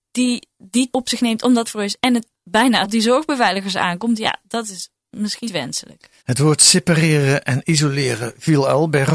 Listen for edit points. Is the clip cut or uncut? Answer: cut